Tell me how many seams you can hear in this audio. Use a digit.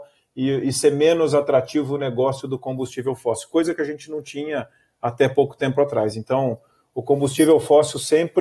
0